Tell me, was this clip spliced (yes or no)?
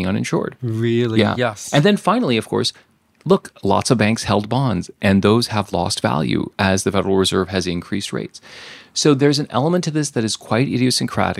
no